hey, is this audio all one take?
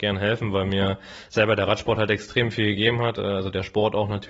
yes; 0 cuts

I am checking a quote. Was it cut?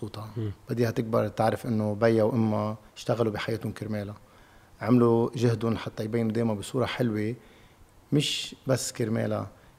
no; 0 cuts

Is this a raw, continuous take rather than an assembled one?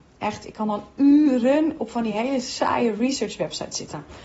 yes; 0 cuts

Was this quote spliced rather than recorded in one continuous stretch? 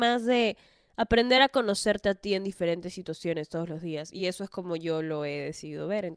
no; 0 cuts

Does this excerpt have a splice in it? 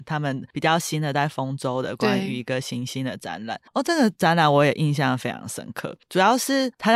yes; 1 cut; at 3.7 s

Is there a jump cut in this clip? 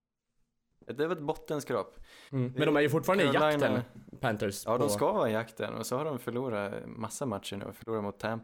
no; 0 cuts

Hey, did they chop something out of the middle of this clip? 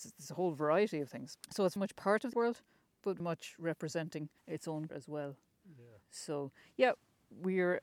yes; 7 cuts; at 1.4 s, 1.8 s, 2.3 s, 3.2 s, 4.4 s, 4.9 s, 6.0 s

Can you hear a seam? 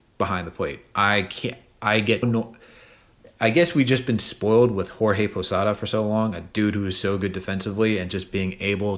yes; 1 cut; at 2.2 s

